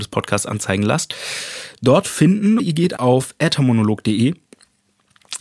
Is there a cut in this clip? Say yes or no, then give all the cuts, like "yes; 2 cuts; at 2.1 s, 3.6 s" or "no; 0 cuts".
yes; 2 cuts; at 2.6 s, 3.0 s